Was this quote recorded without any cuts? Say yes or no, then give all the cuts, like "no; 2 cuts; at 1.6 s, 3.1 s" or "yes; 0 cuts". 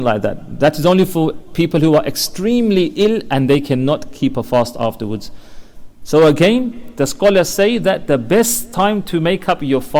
yes; 0 cuts